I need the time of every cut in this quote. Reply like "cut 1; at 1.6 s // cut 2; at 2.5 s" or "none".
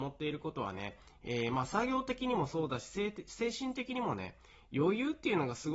none